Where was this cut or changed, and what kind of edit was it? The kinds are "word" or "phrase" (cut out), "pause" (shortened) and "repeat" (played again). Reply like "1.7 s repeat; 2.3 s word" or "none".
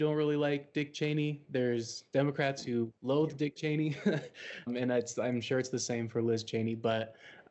3.0 s pause; 4.7 s word

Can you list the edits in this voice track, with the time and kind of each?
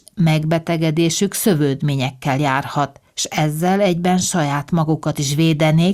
3.1 s pause

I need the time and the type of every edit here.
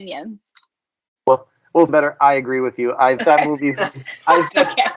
1.9 s phrase; 3.2 s word

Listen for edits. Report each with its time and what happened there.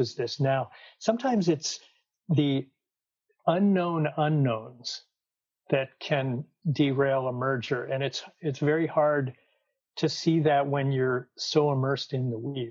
none

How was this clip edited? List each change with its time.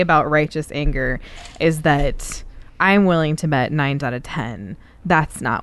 4.0 s word

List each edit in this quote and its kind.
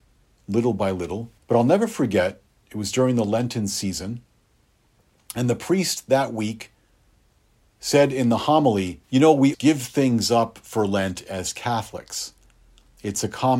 1.4 s pause; 9.0 s pause; 9.5 s word

